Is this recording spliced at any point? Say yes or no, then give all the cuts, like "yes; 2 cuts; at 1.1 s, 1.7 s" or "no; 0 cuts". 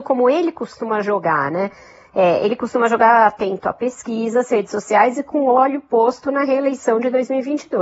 no; 0 cuts